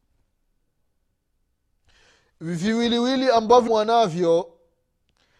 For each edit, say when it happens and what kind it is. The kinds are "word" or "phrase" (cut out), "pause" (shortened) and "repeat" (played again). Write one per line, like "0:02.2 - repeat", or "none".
0:03.7 - word